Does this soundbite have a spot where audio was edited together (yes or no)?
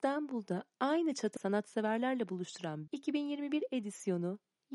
yes